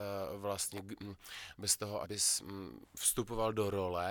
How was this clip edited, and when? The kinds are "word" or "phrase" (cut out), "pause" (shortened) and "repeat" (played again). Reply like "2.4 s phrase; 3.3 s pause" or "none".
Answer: 2.0 s word